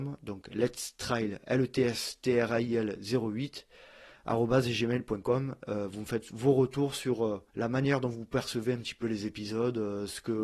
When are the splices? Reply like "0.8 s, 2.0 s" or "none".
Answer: 7.5 s